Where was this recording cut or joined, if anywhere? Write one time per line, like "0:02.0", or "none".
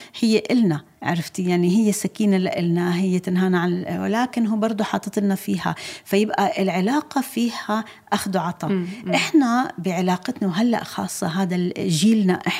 0:00.9